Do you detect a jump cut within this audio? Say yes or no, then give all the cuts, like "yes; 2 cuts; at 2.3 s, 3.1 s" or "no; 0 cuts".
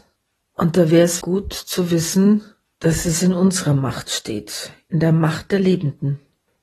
yes; 1 cut; at 1.2 s